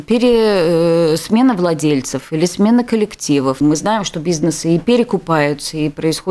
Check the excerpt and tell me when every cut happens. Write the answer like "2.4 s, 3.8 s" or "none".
3.6 s